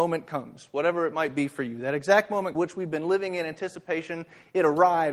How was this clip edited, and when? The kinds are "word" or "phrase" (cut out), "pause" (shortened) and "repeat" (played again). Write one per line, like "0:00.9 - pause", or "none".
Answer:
0:02.5 - phrase